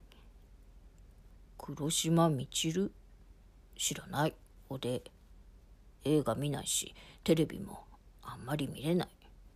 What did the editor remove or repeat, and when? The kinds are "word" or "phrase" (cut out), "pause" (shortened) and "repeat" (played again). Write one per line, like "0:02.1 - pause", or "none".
0:04.4 - pause